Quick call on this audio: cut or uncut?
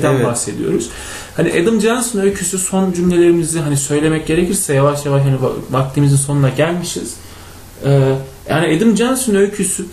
uncut